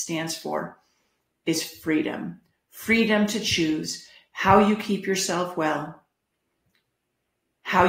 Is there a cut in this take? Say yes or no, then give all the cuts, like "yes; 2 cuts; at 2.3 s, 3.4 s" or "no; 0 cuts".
no; 0 cuts